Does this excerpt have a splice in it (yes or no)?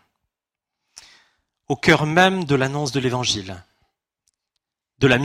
no